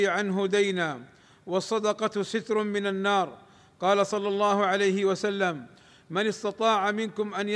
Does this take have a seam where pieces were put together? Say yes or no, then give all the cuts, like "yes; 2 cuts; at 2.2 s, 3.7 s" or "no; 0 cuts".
no; 0 cuts